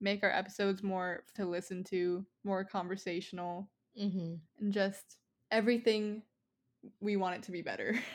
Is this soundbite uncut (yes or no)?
no